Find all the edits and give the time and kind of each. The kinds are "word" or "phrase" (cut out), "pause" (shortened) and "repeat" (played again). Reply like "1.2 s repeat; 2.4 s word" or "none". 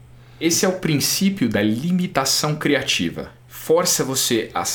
none